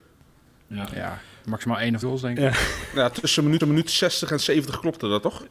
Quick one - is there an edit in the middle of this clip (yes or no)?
yes